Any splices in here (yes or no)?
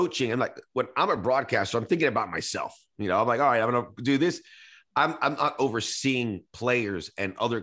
no